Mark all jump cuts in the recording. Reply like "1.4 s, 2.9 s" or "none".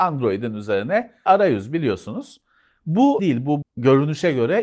1.3 s, 3.2 s, 3.6 s